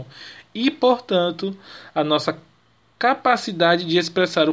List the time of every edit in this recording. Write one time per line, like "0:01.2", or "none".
none

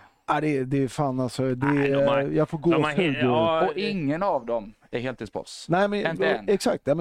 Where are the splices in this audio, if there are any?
none

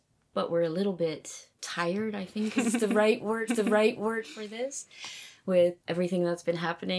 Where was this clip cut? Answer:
0:01.5
0:02.6
0:03.5
0:05.8

